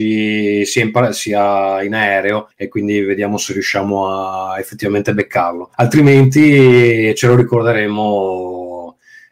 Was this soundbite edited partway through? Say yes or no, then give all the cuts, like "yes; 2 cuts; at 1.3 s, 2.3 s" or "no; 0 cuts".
yes; 2 cuts; at 2.5 s, 5.7 s